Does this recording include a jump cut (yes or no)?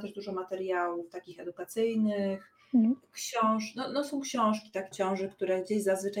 yes